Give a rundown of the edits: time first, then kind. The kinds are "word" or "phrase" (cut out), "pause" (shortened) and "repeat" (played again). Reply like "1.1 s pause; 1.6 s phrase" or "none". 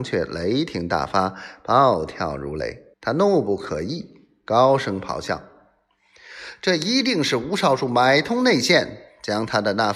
2.9 s pause